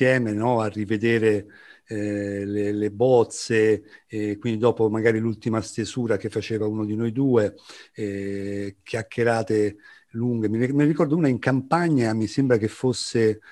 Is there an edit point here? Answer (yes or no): no